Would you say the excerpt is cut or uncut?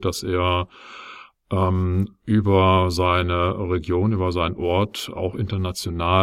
uncut